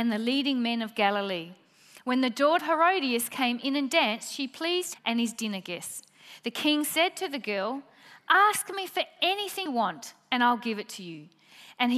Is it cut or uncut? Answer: cut